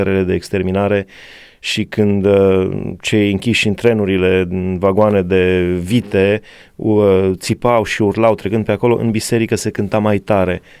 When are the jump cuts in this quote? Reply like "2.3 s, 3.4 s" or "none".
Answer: none

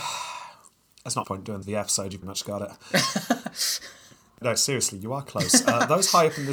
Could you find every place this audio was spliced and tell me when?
1.2 s, 1.6 s, 2.2 s, 4.4 s, 5.3 s

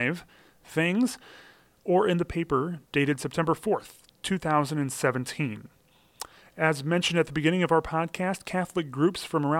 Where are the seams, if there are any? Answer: none

